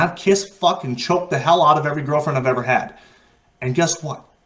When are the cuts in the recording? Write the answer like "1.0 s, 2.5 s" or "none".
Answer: none